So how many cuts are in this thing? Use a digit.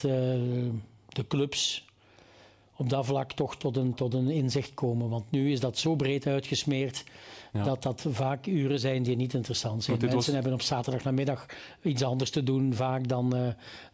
0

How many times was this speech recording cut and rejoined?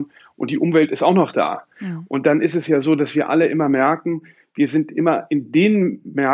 0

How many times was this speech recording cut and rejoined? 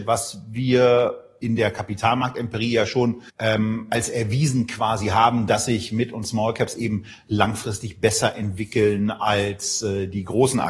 1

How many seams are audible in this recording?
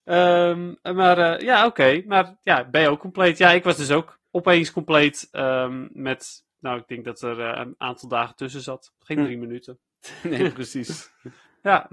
0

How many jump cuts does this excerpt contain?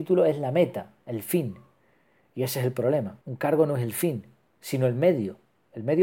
1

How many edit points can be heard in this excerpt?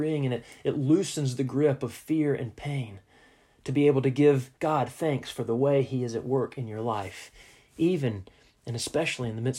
1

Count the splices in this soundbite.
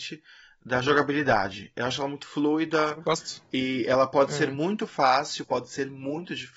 1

